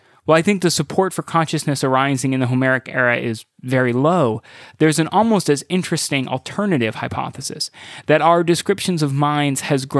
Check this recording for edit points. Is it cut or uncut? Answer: uncut